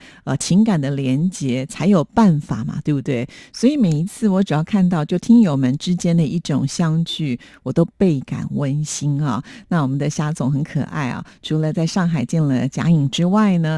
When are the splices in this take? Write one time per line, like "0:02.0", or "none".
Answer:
none

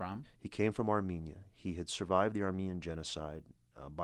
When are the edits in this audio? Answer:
none

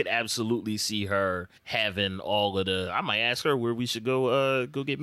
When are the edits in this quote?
0:01.6

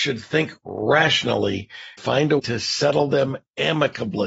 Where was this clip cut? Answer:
0:02.0
0:02.4

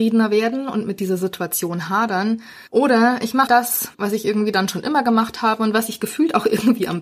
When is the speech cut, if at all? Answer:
0:02.7
0:03.5
0:03.9

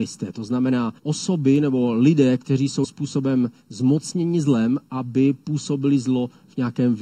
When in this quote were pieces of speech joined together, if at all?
0:01.0
0:02.8

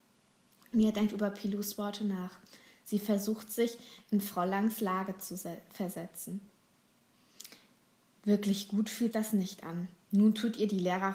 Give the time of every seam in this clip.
0:09.1

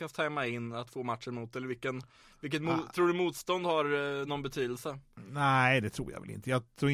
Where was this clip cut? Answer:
none

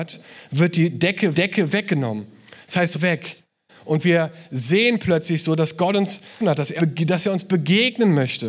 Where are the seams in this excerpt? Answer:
0:01.3
0:02.9
0:06.4
0:06.8

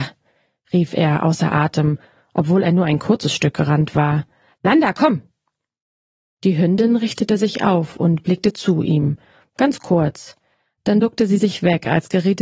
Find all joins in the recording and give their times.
none

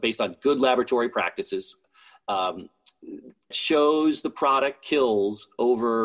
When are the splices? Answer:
0:03.5

